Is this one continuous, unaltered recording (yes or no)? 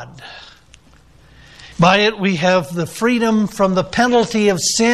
no